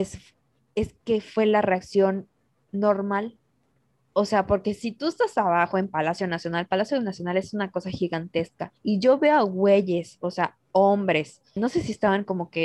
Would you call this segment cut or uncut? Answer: cut